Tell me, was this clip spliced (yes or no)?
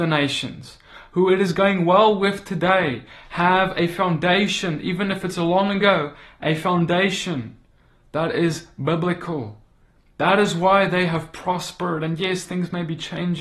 no